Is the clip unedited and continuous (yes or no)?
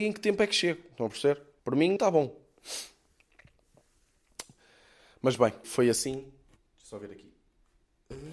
no